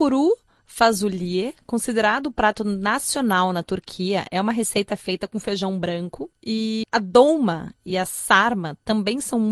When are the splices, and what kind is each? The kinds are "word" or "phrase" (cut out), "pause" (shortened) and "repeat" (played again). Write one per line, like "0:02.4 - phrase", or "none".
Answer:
none